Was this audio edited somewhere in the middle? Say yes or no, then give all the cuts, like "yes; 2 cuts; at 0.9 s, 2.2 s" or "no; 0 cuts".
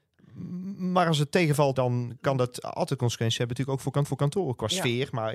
yes; 2 cuts; at 1.7 s, 4.0 s